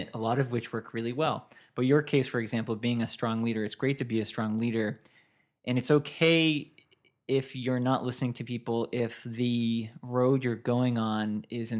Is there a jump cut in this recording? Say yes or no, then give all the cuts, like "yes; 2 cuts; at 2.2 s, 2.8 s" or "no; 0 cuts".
no; 0 cuts